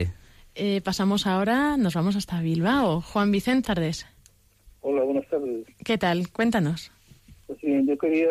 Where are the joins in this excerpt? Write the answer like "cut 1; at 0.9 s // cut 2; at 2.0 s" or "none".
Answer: cut 1; at 3.6 s // cut 2; at 5.7 s